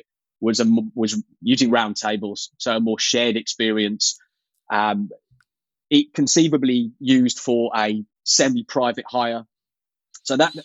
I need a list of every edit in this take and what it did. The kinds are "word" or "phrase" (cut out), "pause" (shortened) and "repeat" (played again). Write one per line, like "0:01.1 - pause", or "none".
none